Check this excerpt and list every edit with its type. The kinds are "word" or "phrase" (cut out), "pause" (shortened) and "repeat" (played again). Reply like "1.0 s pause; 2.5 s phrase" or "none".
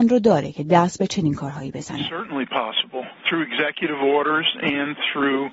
3.1 s pause